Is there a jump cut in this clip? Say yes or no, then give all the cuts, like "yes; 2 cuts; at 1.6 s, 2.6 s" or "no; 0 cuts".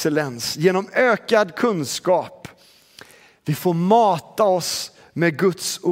no; 0 cuts